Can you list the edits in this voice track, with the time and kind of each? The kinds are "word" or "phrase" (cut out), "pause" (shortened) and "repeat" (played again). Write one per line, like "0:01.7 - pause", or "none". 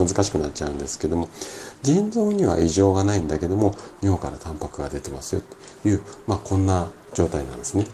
none